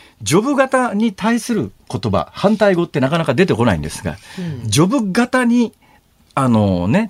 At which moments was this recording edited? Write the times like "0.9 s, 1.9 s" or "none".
1.8 s